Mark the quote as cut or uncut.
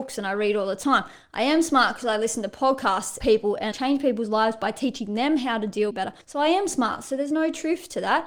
cut